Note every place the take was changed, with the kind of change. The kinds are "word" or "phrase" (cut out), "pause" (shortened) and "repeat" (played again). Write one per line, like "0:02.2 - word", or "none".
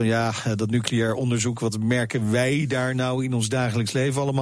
none